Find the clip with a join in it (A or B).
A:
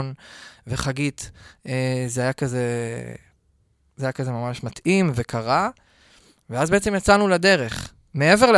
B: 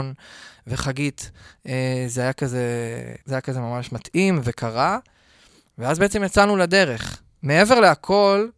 B